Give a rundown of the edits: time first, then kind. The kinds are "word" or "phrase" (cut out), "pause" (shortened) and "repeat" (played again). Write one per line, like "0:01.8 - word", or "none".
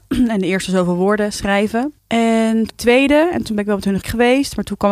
0:02.0 - pause
0:02.7 - word
0:04.0 - word